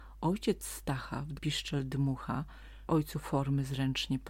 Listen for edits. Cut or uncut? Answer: cut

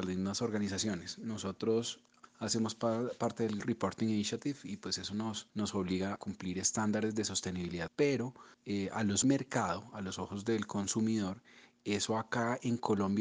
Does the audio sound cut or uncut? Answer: cut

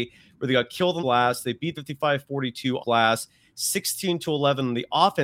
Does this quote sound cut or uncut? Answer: cut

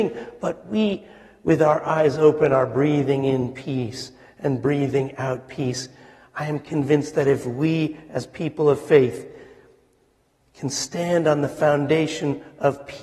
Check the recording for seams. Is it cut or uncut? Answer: uncut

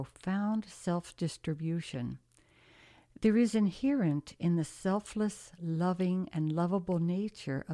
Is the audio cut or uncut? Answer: uncut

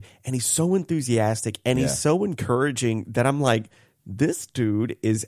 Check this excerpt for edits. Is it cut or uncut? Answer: uncut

